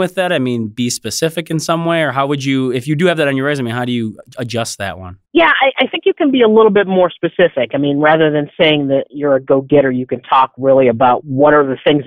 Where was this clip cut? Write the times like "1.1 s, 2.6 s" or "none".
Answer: 5.3 s